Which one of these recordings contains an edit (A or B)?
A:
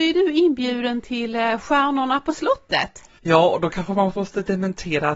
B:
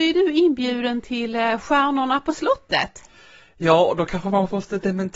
A